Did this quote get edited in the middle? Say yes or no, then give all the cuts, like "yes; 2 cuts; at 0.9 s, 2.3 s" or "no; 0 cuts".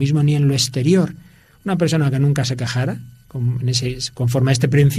no; 0 cuts